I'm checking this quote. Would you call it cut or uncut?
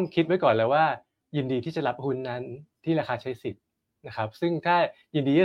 uncut